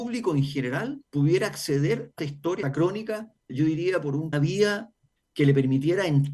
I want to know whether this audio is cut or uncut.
cut